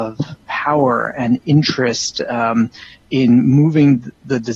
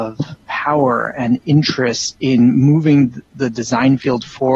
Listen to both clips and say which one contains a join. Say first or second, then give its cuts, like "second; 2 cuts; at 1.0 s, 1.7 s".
second; 1 cut; at 2.1 s